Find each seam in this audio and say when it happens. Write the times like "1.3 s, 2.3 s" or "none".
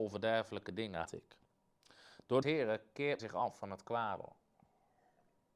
1.1 s, 2.4 s, 3.2 s